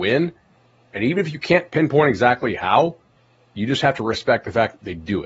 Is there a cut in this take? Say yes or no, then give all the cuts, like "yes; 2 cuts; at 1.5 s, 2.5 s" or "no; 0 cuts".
no; 0 cuts